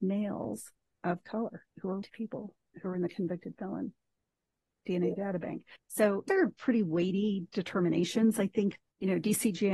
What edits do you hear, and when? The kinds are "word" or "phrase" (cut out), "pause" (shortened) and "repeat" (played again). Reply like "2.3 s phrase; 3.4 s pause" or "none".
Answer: 1.7 s pause; 2.0 s word; 5.8 s pause; 6.3 s phrase; 8.8 s word